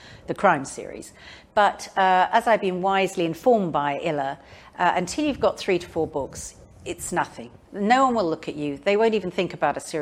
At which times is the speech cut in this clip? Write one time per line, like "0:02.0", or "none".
none